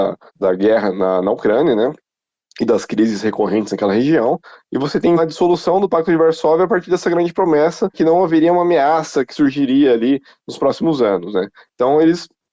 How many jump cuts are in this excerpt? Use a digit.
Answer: 2